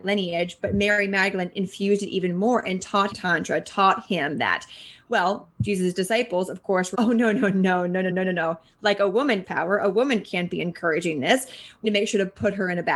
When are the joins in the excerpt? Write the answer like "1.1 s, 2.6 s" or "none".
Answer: 3.1 s, 6.9 s, 8.1 s, 9.4 s, 11.8 s